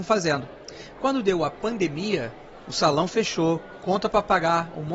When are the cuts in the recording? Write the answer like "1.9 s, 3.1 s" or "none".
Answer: 2.6 s